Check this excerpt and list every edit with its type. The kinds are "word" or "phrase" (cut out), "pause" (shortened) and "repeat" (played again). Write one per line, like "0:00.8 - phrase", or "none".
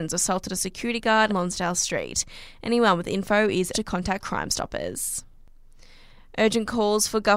0:01.3 - phrase
0:03.7 - word